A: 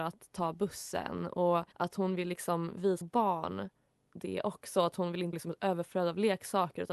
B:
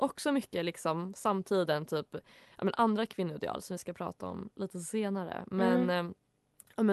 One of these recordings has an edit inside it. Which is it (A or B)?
A